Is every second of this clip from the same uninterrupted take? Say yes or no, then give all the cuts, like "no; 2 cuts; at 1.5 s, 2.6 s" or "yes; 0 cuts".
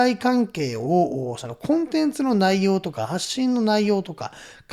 yes; 0 cuts